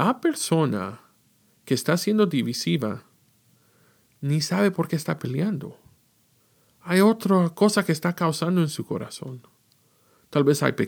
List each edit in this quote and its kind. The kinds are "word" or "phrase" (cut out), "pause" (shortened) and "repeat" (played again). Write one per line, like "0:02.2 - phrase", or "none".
none